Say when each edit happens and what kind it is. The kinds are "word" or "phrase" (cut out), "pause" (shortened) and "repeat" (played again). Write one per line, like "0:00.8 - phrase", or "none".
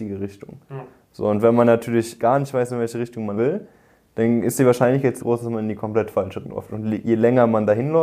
0:02.2 - word
0:03.4 - word
0:05.2 - word
0:06.4 - word